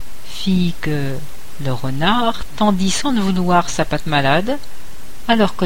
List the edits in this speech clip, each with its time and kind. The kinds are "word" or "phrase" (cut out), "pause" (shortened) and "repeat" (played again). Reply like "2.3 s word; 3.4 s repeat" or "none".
none